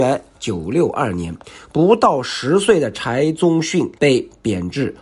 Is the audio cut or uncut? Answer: cut